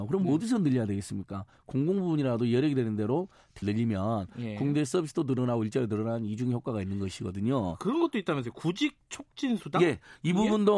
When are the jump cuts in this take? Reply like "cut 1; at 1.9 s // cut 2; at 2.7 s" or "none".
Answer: cut 1; at 3.6 s